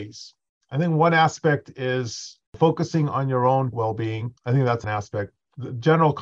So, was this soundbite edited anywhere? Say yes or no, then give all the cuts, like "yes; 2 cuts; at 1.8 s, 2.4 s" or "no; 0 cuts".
yes; 4 cuts; at 2.5 s, 3.7 s, 4.4 s, 4.8 s